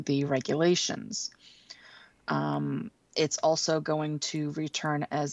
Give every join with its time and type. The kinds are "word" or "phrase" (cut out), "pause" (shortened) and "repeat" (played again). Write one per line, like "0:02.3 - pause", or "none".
none